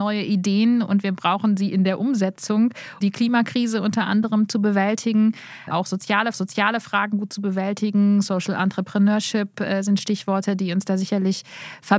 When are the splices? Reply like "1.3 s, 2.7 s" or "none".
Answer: 3.0 s, 5.7 s, 6.3 s